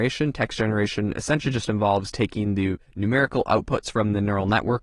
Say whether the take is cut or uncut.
cut